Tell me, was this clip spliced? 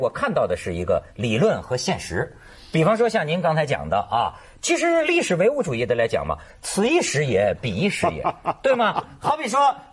no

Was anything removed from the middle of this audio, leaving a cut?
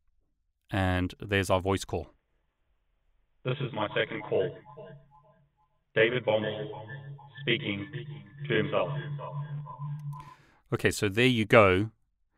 no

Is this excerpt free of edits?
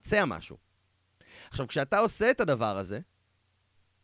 yes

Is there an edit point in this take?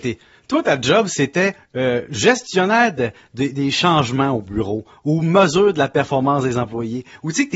no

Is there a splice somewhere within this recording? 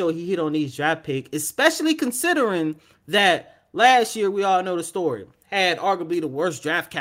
no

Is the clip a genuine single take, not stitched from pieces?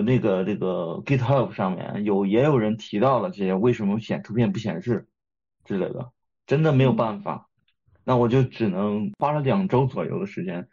yes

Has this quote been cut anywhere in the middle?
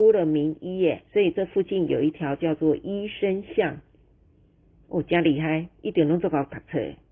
yes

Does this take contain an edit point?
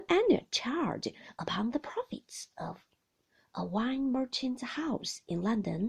no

